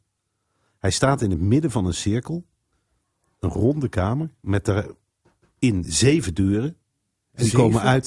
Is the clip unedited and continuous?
yes; 0 cuts

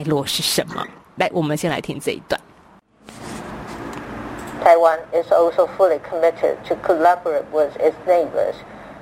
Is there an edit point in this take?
no; 0 cuts

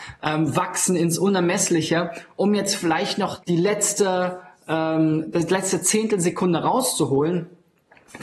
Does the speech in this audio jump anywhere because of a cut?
yes; 1 cut; at 3.4 s

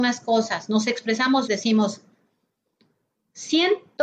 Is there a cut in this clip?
yes; 1 cut; at 1.5 s

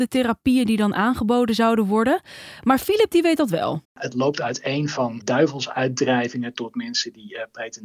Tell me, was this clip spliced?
yes; 2 cuts; at 3.8 s, 5.2 s

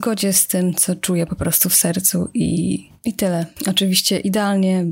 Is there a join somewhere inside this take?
no; 0 cuts

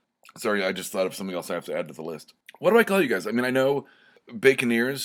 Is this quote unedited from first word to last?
yes; 0 cuts

